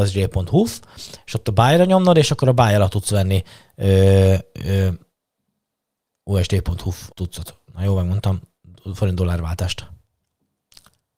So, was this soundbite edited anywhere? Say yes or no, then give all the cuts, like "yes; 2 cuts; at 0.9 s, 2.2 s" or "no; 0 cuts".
yes; 1 cut; at 7.1 s